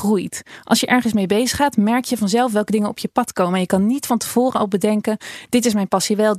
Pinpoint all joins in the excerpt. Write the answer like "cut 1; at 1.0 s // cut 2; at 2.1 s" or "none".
none